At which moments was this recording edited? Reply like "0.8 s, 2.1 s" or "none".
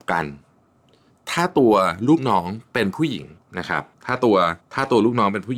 3.4 s, 3.9 s, 4.6 s